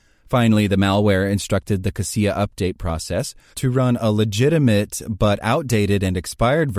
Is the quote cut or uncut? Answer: uncut